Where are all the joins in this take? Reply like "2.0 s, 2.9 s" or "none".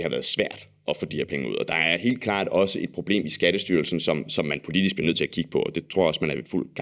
none

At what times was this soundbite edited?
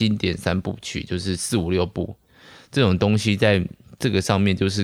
none

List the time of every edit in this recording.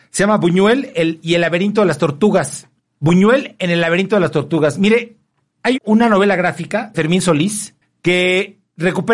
5.7 s, 6.9 s

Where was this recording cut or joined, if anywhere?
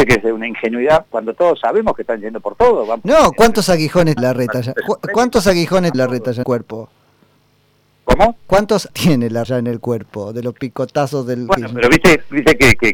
1.1 s, 4.2 s, 5.9 s, 6.4 s, 8.9 s, 9.4 s

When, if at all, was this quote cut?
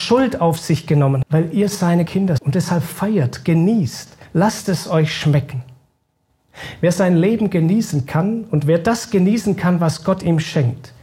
1.2 s, 2.1 s, 2.4 s, 4.3 s

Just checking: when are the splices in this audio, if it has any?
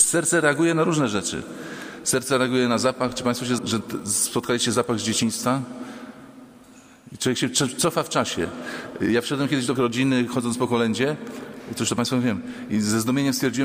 3.6 s, 9.8 s

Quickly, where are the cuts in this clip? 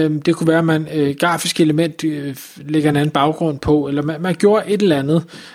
none

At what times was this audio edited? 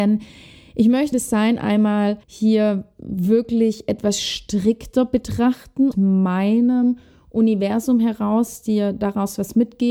1.1 s, 2.2 s, 5.9 s

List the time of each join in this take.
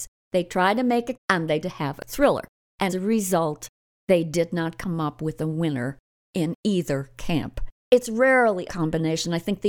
1.1 s, 1.6 s, 2.1 s, 2.9 s, 8.7 s

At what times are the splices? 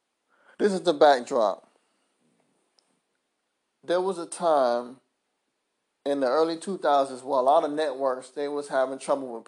none

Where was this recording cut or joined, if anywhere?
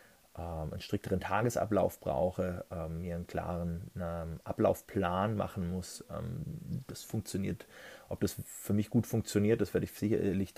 none

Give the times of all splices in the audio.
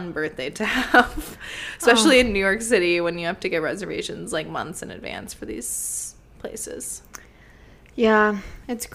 none

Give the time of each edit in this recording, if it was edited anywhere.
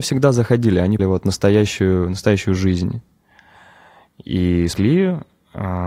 1.0 s, 4.7 s

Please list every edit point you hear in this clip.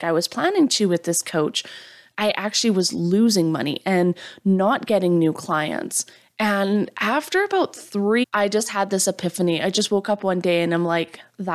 8.2 s

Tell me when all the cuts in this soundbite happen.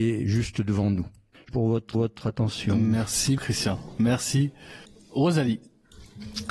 1.5 s, 1.9 s, 3.4 s, 4.8 s

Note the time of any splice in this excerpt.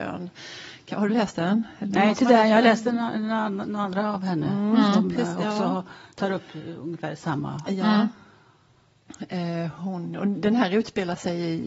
none

